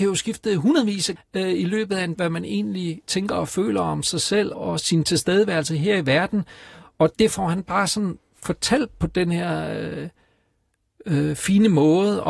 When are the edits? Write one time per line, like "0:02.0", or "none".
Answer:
0:01.2
0:02.1
0:04.5